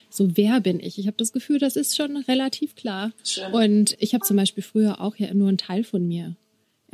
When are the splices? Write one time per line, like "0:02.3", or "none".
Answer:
0:03.2
0:03.9